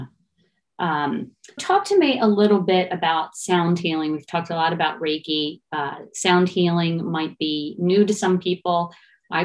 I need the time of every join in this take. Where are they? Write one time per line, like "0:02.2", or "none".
0:01.6